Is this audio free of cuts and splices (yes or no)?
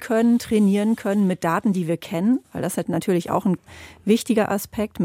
yes